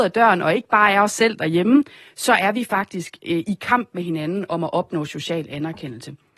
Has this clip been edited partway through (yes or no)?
no